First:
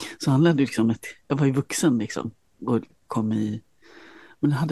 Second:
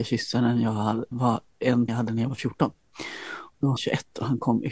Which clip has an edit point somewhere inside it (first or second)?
second